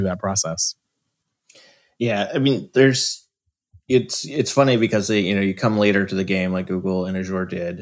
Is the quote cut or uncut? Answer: uncut